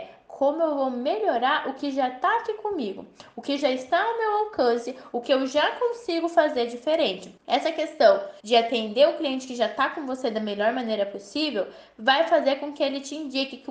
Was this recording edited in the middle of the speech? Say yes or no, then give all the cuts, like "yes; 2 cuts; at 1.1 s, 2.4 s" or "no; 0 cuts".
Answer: yes; 2 cuts; at 7.4 s, 8.4 s